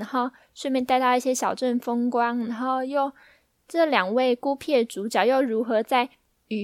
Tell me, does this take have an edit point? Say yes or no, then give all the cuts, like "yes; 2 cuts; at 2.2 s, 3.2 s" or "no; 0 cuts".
no; 0 cuts